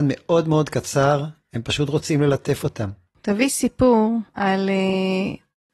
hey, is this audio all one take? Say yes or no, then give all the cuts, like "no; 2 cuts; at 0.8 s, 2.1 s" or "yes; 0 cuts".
no; 1 cut; at 4.3 s